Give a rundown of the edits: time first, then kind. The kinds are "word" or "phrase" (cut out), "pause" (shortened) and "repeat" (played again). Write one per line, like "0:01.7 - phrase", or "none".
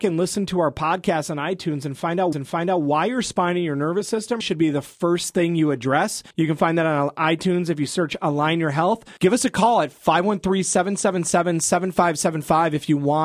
0:02.3 - repeat
0:04.4 - word
0:06.3 - pause
0:09.2 - pause

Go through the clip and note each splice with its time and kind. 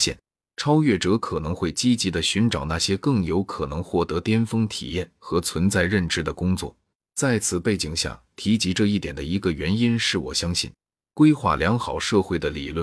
0:07.0 - pause

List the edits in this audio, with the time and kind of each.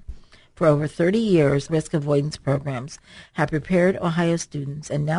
0:01.7 - phrase

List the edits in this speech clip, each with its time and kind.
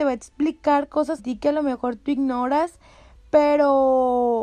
0:01.2 - word

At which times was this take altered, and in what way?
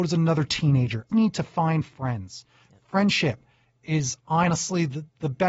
0:01.1 - phrase

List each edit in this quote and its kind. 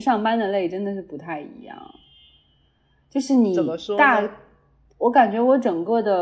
none

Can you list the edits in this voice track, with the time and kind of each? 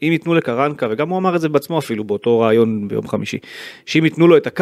none

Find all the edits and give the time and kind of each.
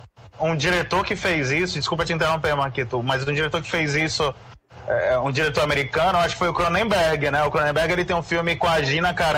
none

